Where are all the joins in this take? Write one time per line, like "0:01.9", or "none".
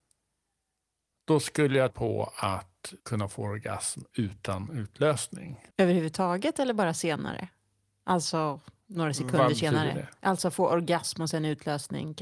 0:01.9
0:03.0
0:05.7
0:08.8
0:10.2